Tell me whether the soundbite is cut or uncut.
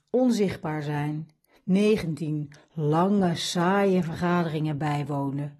uncut